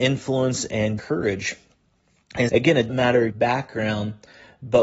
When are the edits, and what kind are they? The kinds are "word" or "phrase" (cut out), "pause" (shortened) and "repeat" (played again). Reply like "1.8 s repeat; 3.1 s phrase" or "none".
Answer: 1.0 s word; 2.5 s word; 2.9 s word; 3.3 s word